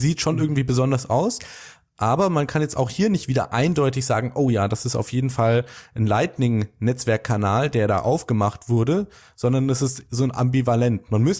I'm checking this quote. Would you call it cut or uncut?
uncut